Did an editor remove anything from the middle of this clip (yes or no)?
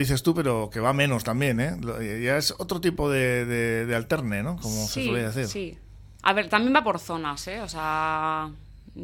no